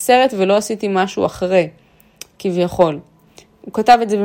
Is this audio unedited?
yes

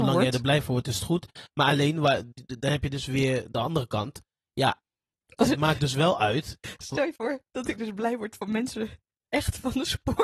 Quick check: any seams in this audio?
no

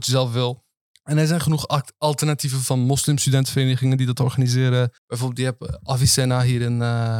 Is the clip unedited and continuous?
no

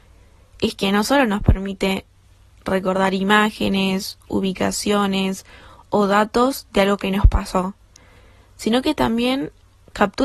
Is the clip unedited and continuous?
yes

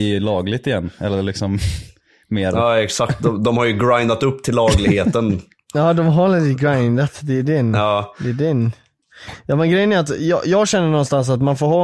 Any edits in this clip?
no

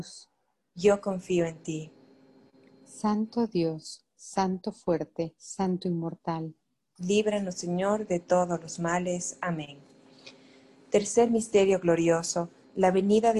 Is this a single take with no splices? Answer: yes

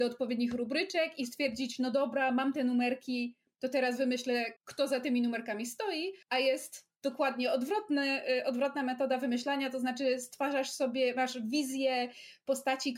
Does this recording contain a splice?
yes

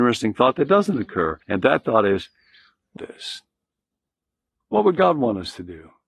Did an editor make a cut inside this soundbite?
yes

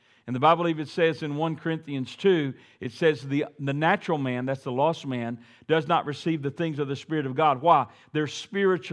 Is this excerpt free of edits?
yes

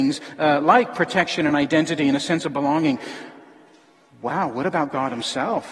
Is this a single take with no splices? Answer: yes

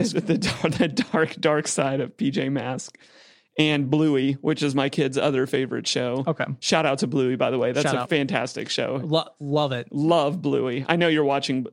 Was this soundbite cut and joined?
no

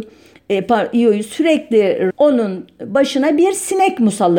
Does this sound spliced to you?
yes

